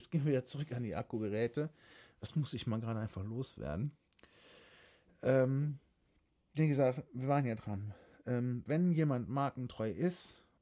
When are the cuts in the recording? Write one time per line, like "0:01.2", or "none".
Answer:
none